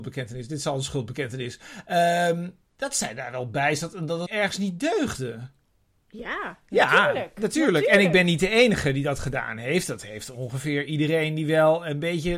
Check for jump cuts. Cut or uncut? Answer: cut